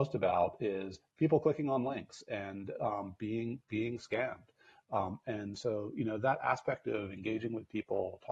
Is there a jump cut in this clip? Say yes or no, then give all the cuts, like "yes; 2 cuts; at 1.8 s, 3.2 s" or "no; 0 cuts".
no; 0 cuts